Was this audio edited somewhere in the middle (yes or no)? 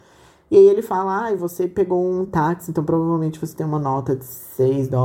no